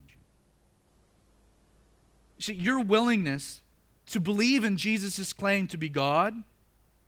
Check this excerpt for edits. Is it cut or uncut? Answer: uncut